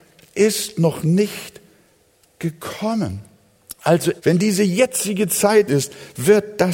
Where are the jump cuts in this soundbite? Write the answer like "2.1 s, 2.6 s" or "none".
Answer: 4.2 s, 5.7 s